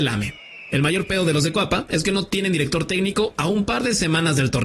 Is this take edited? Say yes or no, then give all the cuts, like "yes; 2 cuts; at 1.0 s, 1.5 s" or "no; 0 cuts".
no; 0 cuts